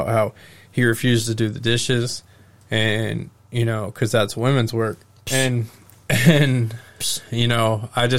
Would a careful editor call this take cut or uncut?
uncut